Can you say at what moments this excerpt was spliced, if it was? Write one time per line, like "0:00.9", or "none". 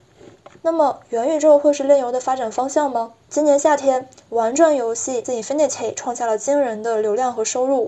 0:03.2
0:05.2

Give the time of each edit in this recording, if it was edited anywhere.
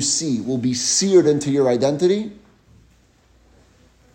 none

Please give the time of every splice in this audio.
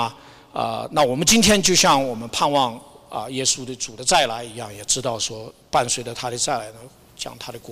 none

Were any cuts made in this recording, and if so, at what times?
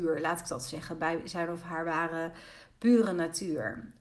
none

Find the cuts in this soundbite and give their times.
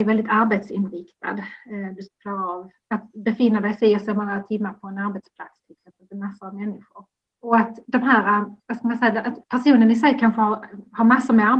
0:02.8
0:07.3
0:08.6
0:09.4

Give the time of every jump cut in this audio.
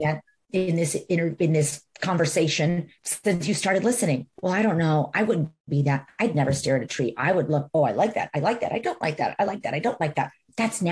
0:03.0

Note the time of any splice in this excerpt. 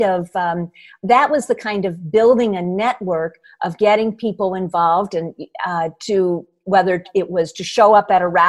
none

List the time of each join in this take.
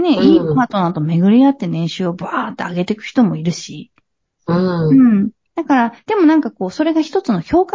none

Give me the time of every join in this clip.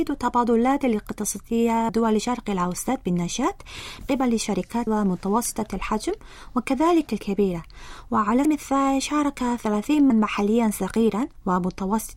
0:01.9
0:04.0
0:04.9
0:07.1
0:08.4
0:10.1

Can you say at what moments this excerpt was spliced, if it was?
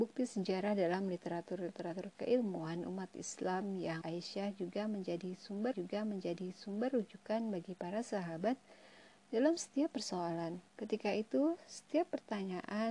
0:04.0
0:05.7
0:10.7

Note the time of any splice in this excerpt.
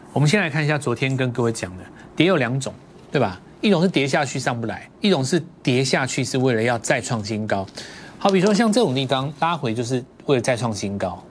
none

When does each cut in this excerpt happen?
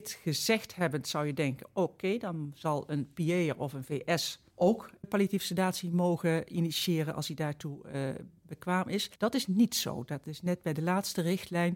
0:04.5
0:09.2

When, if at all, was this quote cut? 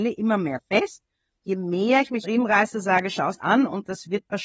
0:02.2
0:03.4

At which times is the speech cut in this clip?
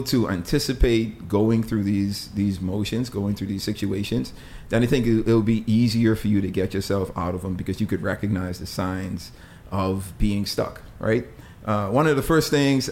none

